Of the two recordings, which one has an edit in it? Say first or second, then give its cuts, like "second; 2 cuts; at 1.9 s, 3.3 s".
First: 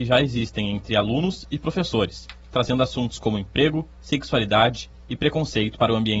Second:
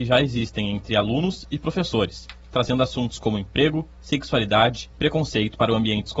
second; 1 cut; at 5.0 s